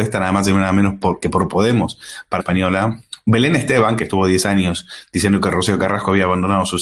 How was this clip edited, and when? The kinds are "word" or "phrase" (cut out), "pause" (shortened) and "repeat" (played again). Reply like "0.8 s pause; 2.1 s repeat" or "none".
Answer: 1.2 s word; 2.4 s phrase